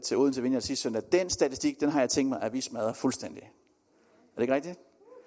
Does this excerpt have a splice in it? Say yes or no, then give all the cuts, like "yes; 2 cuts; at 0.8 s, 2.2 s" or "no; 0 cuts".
no; 0 cuts